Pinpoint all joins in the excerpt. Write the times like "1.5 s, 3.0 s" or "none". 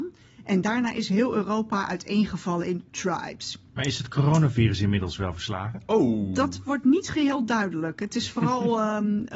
none